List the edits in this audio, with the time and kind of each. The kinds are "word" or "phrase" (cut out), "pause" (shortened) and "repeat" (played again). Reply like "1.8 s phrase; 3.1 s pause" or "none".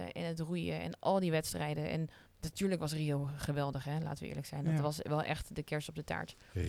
2.3 s pause